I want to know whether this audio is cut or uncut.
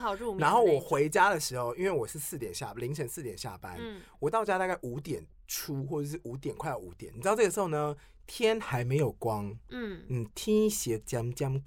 uncut